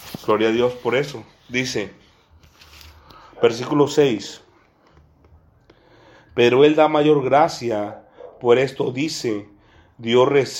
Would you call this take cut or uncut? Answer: uncut